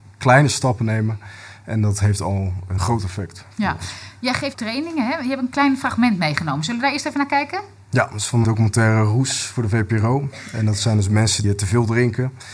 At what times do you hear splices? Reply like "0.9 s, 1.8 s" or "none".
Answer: 2.8 s, 4.5 s, 8.4 s, 11.4 s